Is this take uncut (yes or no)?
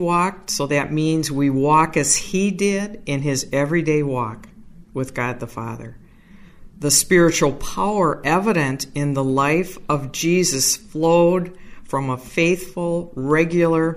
yes